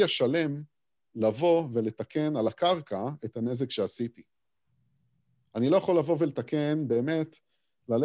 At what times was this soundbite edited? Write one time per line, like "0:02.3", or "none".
none